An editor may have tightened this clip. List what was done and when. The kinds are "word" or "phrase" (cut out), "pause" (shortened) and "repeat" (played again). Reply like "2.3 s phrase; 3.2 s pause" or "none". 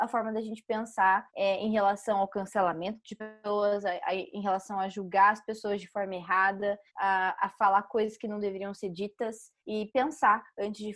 1.3 s pause; 6.9 s pause; 9.6 s pause